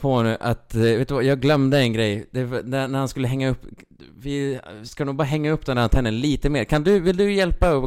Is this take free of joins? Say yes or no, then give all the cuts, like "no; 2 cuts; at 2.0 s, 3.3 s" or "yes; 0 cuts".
yes; 0 cuts